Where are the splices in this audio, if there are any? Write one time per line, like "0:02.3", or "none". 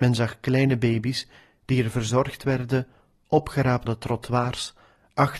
0:03.9